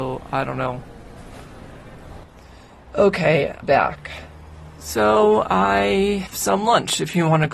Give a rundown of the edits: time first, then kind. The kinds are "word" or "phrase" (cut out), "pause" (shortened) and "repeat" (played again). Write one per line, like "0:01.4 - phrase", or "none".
0:03.6 - word
0:06.3 - word